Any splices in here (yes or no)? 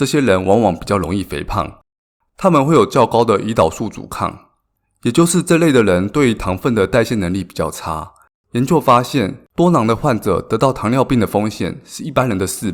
yes